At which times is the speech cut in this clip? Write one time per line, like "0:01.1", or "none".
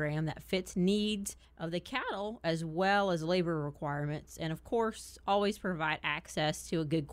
0:01.4